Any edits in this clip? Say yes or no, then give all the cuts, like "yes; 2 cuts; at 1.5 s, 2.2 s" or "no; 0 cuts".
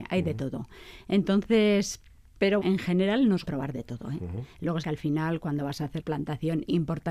yes; 4 cuts; at 2.6 s, 3.4 s, 4.8 s, 6.0 s